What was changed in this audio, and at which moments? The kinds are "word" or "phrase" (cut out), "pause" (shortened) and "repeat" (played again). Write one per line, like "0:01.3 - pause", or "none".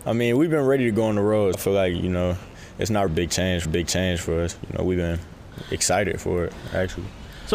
0:01.5 - word
0:03.1 - word
0:03.6 - repeat